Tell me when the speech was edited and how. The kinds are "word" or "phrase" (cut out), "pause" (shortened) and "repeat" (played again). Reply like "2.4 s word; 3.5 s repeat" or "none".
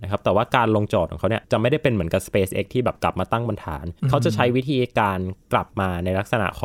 4.0 s pause